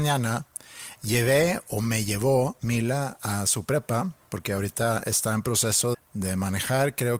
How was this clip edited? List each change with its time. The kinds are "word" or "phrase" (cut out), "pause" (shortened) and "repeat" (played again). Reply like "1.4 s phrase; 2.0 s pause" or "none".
5.9 s word